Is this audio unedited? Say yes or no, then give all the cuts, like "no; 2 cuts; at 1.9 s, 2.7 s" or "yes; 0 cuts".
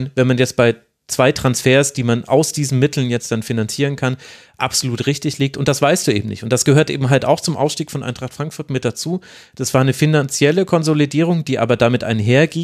yes; 0 cuts